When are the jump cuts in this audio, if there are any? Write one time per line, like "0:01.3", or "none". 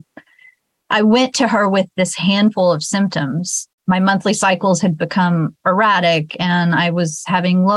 0:03.8